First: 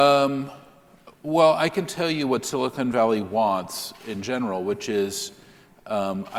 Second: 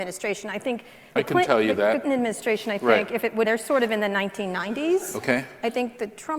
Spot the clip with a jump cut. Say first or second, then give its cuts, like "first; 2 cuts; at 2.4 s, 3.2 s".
second; 3 cuts; at 1.2 s, 2.0 s, 3.4 s